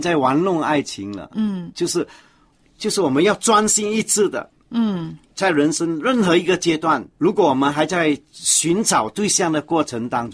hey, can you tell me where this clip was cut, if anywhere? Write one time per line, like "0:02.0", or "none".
0:01.7
0:02.5
0:05.3
0:07.1